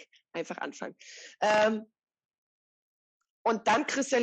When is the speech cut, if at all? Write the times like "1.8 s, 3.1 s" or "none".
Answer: none